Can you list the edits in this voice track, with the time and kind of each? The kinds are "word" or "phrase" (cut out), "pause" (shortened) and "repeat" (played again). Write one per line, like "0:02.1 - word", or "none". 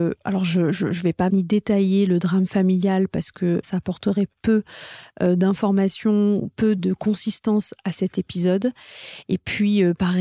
0:01.3 - word
0:03.6 - word
0:06.8 - word

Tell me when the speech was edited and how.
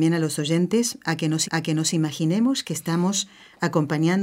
0:01.4 - repeat

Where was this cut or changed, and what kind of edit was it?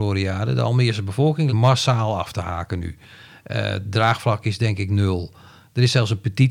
0:01.5 - word

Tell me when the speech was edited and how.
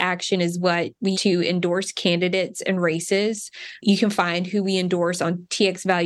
0:01.1 - word

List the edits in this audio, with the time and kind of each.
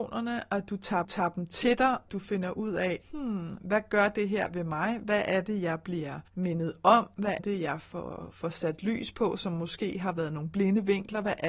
0:01.0 - repeat
0:02.1 - phrase
0:03.0 - pause
0:06.3 - pause
0:07.4 - word

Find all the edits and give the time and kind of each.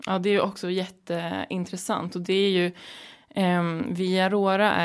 none

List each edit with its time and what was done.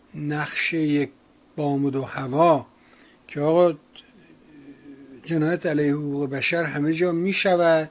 none

